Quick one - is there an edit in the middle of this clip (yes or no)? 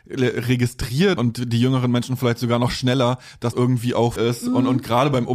yes